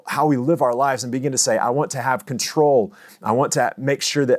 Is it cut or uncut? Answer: uncut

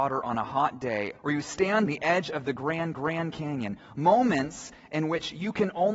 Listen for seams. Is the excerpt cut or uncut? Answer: cut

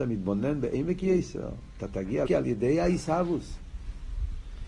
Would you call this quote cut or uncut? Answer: cut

